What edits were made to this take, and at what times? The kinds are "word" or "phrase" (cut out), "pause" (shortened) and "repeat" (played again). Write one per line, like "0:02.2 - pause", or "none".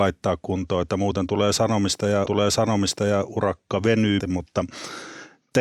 0:02.3 - repeat
0:04.2 - word

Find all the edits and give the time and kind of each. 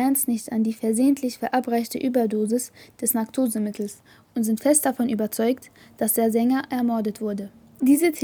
none

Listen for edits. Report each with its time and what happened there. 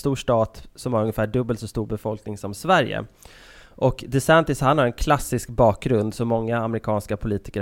none

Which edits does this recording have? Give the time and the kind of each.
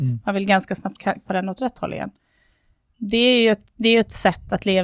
0:01.3 - word

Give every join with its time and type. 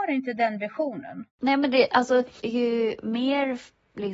0:01.3 - pause
0:02.4 - word

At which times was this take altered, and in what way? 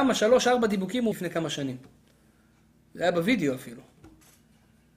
0:01.1 - word

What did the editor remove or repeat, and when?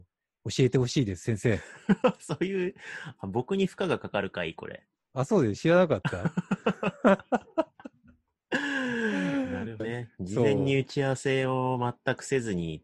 0:09.8 - word

